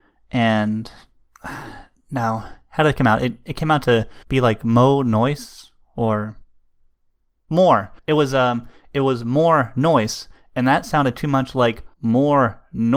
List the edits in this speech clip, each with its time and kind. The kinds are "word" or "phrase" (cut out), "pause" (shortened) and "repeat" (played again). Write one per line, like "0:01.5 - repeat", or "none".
0:04.2 - pause
0:08.0 - pause
0:11.9 - pause

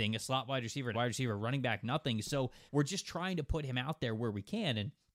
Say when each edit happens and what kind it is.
0:00.9 - word
0:02.7 - pause

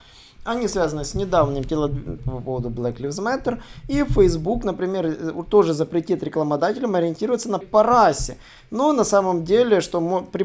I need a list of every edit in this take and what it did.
0:02.2 - phrase
0:07.6 - word

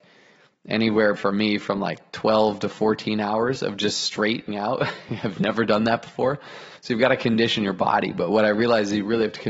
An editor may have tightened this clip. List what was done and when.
0:01.2 - word
0:04.5 - word
0:06.8 - pause

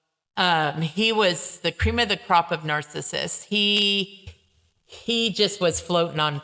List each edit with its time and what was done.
0:01.6 - word

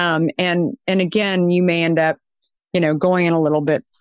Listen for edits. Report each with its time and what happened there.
none

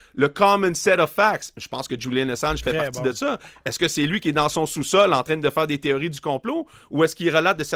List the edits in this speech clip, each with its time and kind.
none

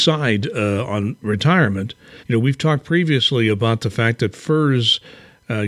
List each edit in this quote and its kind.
0:02.2 - pause

